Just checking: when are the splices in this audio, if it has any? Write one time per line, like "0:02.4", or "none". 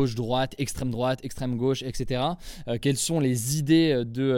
none